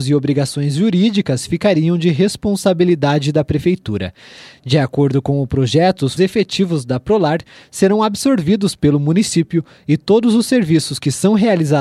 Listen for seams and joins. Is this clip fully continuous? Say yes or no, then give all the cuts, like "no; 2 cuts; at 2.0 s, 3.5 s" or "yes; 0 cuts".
no; 1 cut; at 6.2 s